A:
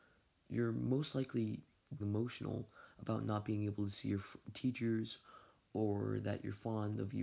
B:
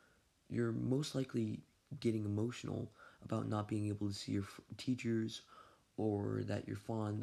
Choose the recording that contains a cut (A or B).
A